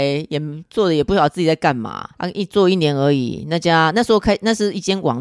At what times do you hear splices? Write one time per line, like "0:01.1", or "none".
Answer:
0:02.1